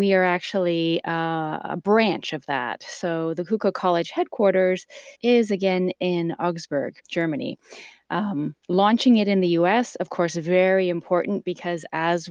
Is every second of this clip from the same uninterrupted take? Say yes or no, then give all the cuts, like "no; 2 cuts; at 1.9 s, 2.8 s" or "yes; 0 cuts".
no; 3 cuts; at 5.1 s, 7.0 s, 8.6 s